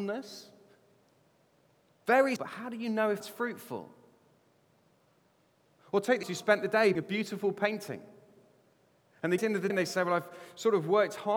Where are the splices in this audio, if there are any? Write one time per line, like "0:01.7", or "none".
0:02.4
0:03.2
0:06.2
0:06.9
0:09.4
0:09.7